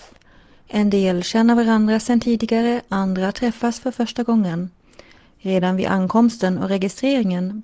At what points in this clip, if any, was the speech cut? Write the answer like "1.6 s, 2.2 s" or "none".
none